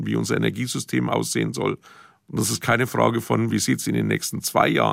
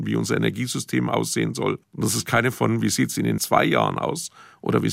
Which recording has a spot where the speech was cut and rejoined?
second; 3 cuts; at 1.8 s, 2.5 s, 3.4 s

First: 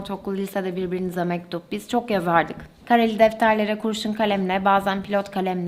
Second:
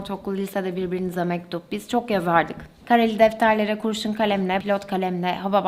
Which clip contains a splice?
second; 1 cut; at 4.6 s

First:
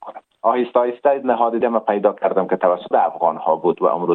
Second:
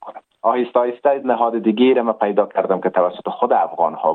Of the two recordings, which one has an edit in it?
first; 2 cuts; at 1.6 s, 2.9 s

